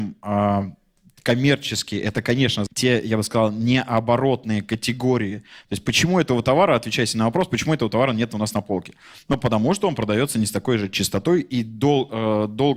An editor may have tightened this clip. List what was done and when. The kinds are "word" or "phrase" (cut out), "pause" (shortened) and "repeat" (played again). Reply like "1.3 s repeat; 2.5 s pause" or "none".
2.7 s word